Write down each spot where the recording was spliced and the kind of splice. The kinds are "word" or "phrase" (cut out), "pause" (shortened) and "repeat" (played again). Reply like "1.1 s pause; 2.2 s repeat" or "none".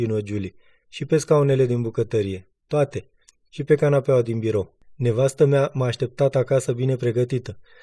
none